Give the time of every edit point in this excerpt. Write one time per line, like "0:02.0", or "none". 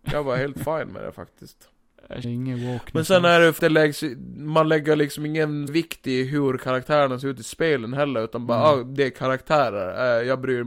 0:02.2
0:03.6
0:05.7